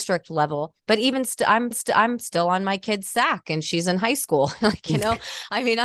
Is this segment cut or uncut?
cut